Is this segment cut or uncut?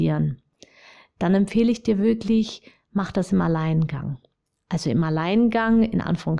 uncut